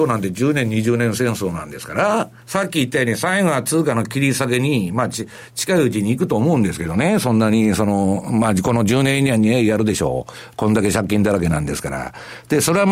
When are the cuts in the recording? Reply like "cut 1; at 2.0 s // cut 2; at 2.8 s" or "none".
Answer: cut 1; at 2.4 s